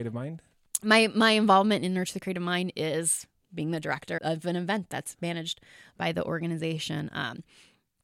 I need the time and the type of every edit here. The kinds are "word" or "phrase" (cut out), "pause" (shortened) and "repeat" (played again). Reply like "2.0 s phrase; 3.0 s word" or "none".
4.2 s word